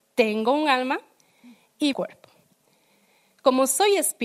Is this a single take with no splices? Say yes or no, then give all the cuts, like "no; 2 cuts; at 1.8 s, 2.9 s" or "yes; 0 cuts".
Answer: no; 1 cut; at 1.9 s